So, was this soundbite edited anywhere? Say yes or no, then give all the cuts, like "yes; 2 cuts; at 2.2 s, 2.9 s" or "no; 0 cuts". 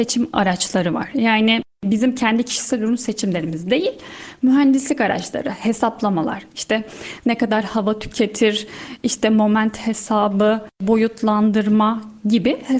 yes; 1 cut; at 10.7 s